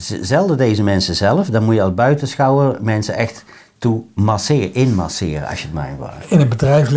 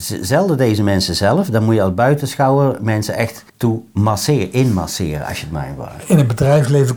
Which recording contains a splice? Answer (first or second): second